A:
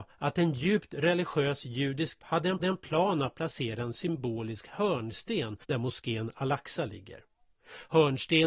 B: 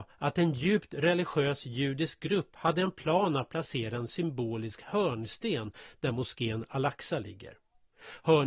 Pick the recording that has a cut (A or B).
A